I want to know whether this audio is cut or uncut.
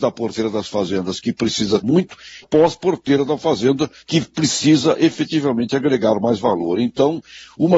cut